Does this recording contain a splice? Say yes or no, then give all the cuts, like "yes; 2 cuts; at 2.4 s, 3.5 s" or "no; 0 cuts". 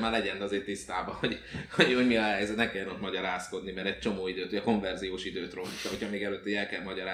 no; 0 cuts